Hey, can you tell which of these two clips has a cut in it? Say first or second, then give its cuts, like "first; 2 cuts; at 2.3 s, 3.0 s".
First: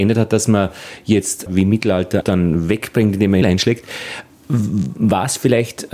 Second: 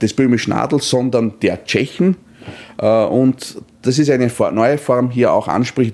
first; 3 cuts; at 1.5 s, 2.2 s, 3.4 s